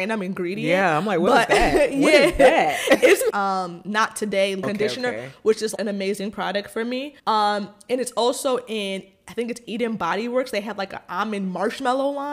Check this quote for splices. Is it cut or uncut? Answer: cut